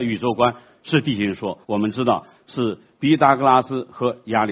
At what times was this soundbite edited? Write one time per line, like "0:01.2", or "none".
0:01.6